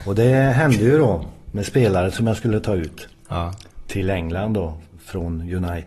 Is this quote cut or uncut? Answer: uncut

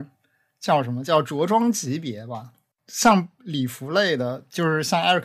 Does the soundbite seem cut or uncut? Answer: uncut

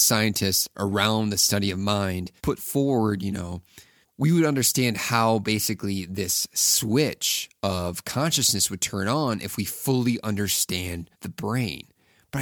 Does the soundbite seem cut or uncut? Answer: cut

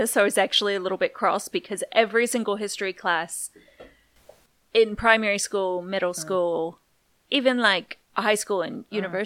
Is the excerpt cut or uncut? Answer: uncut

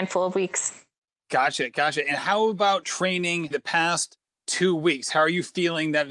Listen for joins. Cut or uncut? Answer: cut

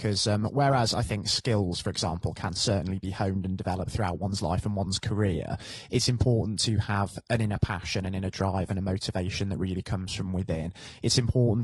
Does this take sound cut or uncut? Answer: uncut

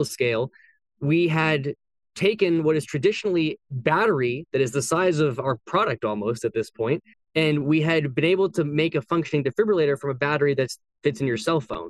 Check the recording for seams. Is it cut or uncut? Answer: cut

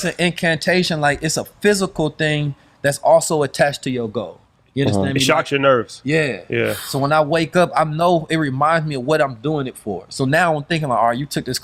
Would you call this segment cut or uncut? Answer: uncut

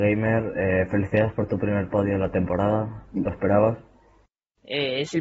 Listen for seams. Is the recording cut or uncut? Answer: uncut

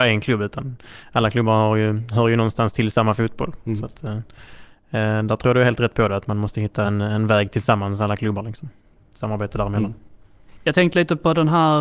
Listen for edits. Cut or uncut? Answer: uncut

